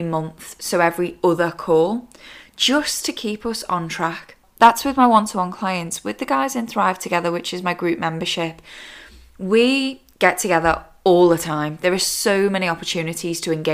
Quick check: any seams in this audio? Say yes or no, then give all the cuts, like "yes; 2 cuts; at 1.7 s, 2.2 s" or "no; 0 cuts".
no; 0 cuts